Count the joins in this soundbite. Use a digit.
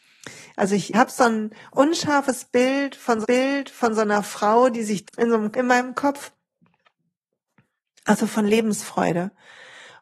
4